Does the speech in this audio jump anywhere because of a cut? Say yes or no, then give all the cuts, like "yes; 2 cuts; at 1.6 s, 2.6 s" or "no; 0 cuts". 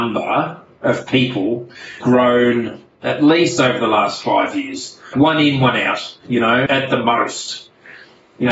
yes; 3 cuts; at 2.0 s, 5.1 s, 6.7 s